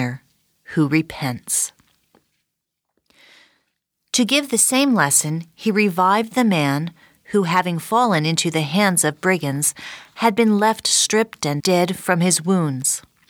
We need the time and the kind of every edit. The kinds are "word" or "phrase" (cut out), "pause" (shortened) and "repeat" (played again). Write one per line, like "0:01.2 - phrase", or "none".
0:11.6 - word